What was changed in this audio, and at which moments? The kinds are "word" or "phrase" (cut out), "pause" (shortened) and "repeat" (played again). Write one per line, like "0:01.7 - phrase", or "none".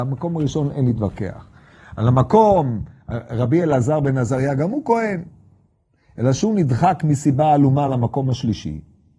none

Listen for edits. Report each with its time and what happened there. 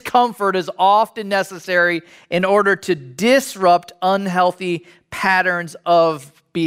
none

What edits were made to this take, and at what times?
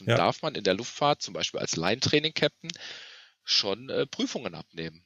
none

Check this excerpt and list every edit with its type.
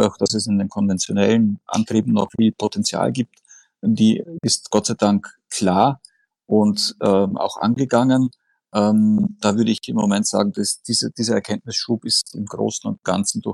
none

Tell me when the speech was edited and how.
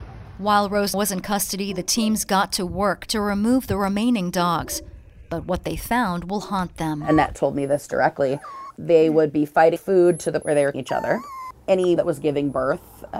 0:00.9 - word
0:09.8 - word
0:10.4 - word
0:10.7 - word
0:12.0 - word

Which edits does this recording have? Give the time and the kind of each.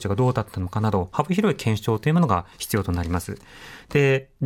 0:02.5 - pause

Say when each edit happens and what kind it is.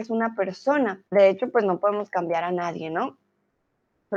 0:01.1 - pause

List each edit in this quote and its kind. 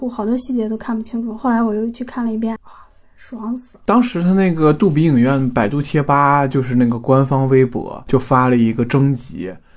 0:02.6 - word

